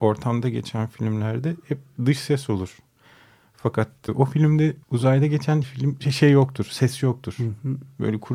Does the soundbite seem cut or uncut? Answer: cut